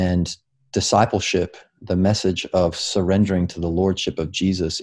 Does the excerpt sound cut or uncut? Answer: uncut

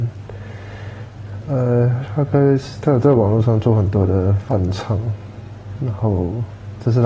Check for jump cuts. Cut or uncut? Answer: uncut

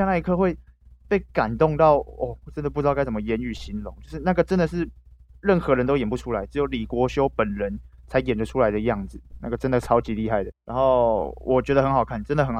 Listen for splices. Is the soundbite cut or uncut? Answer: cut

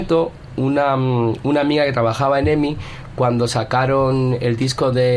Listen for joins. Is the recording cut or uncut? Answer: uncut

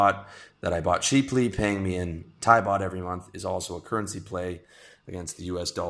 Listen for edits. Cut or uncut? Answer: uncut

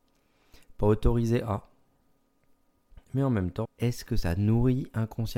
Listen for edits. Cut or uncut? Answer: cut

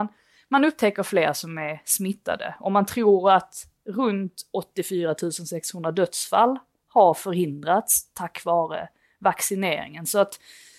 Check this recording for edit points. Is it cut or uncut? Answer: uncut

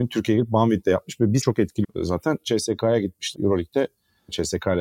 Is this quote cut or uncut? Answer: cut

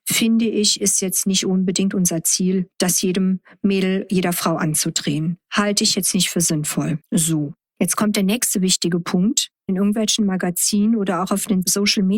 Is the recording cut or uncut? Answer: cut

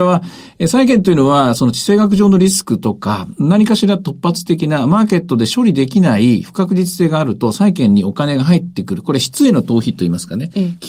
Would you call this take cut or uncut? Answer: uncut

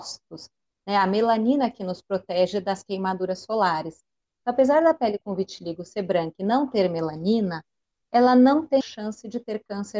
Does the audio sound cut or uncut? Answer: cut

